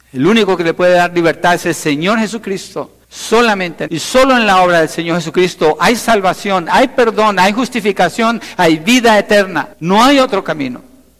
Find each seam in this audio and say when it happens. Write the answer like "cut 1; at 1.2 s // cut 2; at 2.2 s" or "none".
cut 1; at 3.0 s // cut 2; at 3.9 s // cut 3; at 9.7 s